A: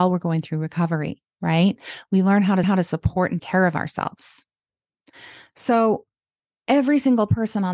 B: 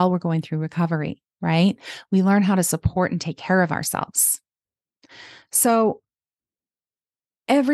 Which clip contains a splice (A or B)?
A